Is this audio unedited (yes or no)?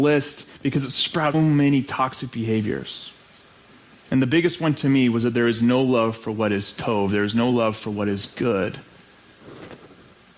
no